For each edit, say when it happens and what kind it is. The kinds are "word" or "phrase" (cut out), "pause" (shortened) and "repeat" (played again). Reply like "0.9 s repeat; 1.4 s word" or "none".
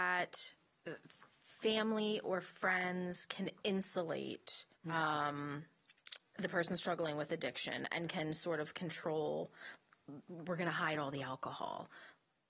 1.3 s pause; 4.7 s pause